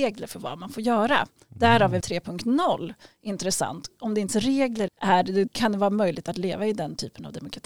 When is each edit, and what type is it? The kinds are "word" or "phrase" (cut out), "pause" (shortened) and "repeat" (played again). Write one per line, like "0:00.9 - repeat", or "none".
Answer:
0:02.0 - word
0:04.3 - word
0:04.9 - phrase
0:05.5 - word